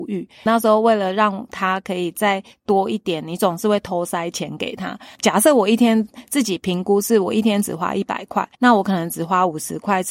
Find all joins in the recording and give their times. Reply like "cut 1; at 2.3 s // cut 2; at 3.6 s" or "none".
cut 1; at 8.5 s